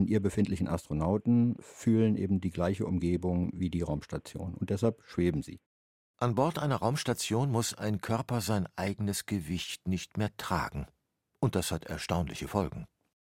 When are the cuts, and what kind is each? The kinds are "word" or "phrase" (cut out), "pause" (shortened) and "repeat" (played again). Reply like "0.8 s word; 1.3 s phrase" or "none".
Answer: none